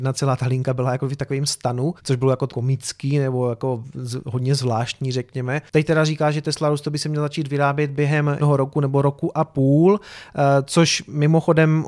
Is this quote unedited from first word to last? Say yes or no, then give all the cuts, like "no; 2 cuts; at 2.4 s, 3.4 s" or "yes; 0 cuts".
no; 3 cuts; at 2.0 s, 2.5 s, 8.4 s